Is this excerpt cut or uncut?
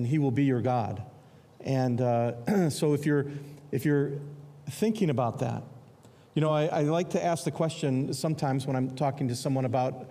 uncut